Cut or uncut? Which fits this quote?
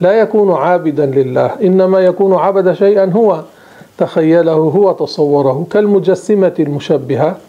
uncut